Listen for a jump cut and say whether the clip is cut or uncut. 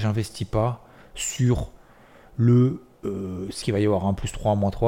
cut